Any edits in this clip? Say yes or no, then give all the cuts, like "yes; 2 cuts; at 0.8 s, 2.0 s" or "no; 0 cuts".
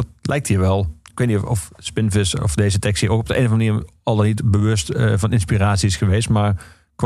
no; 0 cuts